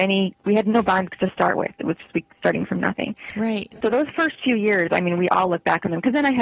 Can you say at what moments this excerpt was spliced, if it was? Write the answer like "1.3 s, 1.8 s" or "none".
2.0 s